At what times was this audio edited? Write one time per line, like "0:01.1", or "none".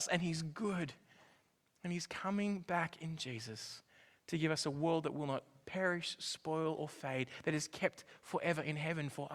none